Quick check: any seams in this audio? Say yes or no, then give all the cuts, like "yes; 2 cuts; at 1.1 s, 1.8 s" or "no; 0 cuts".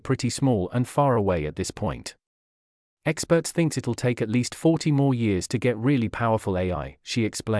no; 0 cuts